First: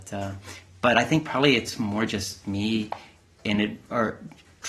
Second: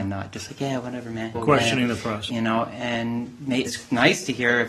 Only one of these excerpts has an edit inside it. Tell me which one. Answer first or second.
second